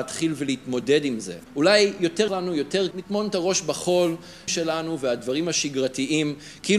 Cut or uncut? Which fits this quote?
cut